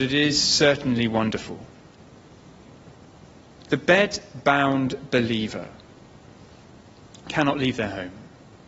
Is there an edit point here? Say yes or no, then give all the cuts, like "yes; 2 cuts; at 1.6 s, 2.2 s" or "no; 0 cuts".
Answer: no; 0 cuts